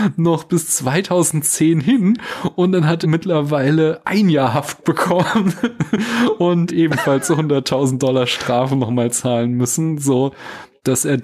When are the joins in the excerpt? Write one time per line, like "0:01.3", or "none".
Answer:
0:03.0
0:06.7